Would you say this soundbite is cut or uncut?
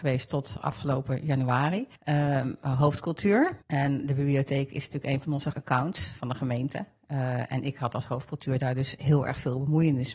cut